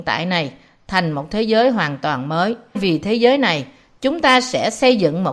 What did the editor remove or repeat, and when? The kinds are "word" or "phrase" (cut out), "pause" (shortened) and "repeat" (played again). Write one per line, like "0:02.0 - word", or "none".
0:02.8 - word